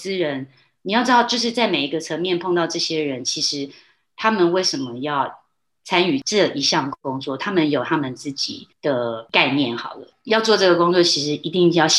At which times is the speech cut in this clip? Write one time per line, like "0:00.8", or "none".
none